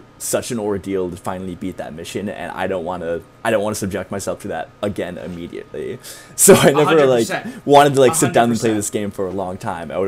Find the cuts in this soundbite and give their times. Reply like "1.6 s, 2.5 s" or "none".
4.7 s